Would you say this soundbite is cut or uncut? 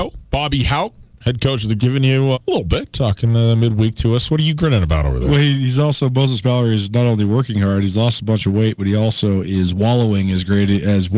cut